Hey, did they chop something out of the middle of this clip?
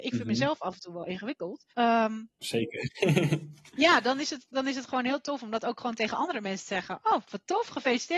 yes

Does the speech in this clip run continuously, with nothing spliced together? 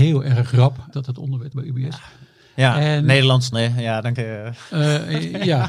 no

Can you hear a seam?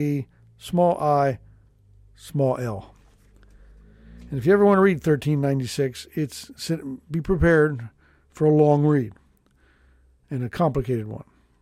no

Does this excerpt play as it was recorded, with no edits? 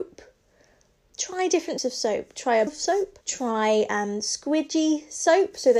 no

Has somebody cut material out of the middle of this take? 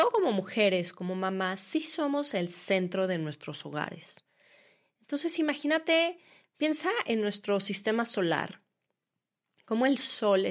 no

